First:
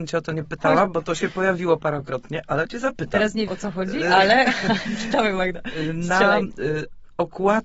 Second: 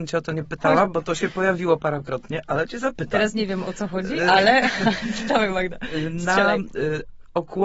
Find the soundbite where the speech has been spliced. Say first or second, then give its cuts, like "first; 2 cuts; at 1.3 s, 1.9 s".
first; 1 cut; at 3.5 s